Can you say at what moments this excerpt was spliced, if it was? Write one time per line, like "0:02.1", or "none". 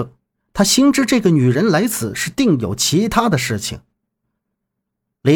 none